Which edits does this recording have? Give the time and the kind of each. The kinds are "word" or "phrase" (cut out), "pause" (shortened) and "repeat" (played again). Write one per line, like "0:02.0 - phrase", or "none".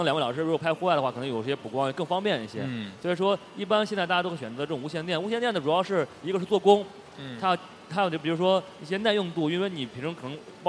none